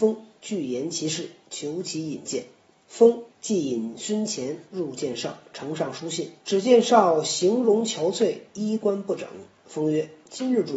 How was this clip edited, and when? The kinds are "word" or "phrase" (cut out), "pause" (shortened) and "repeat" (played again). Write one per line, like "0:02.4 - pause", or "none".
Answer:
0:03.3 - pause
0:06.4 - pause